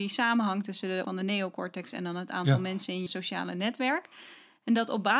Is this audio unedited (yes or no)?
no